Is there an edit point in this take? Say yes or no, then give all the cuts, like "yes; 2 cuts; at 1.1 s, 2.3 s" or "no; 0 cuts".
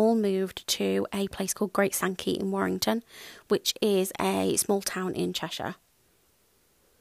no; 0 cuts